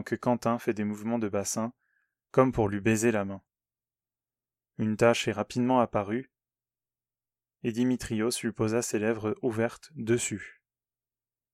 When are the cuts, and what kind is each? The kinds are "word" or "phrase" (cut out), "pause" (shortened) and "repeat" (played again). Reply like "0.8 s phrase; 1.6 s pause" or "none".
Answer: none